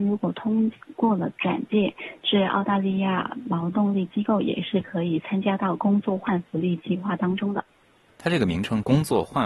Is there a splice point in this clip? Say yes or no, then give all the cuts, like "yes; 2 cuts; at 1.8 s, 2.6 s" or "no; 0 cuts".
no; 0 cuts